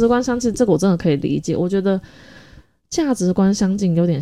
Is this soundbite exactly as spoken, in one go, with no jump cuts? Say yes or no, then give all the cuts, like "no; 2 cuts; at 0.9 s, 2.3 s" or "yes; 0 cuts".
yes; 0 cuts